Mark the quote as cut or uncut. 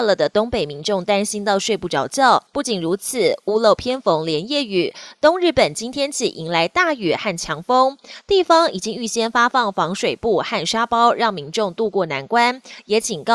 cut